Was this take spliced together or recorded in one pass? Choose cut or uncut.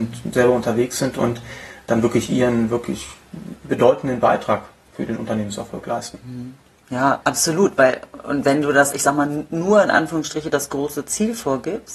cut